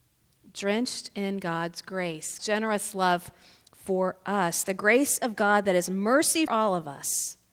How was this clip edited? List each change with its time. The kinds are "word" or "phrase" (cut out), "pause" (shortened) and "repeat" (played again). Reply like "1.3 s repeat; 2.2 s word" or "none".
2.4 s word; 6.5 s word